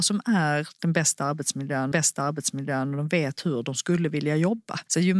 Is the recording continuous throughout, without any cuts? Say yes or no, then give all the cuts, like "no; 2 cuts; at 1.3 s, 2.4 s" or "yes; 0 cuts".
no; 1 cut; at 1.9 s